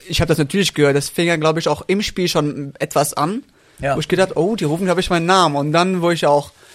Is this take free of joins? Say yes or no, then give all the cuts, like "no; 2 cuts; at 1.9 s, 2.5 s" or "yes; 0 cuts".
yes; 0 cuts